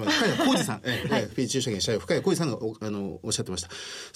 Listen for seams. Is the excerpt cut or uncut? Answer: cut